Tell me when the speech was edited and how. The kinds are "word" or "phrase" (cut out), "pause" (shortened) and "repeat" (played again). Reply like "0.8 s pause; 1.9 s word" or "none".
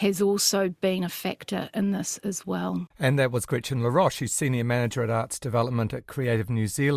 2.9 s pause